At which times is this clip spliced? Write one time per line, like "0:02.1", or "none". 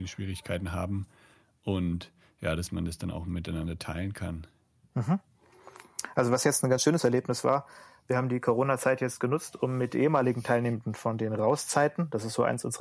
none